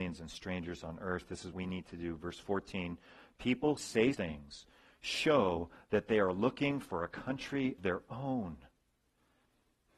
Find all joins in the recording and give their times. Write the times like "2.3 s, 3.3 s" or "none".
1.5 s, 3.8 s, 4.1 s, 7.8 s